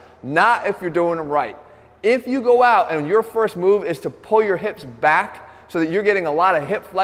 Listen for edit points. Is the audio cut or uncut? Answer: uncut